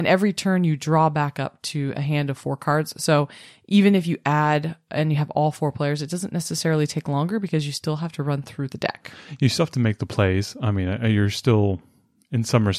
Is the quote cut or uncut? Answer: uncut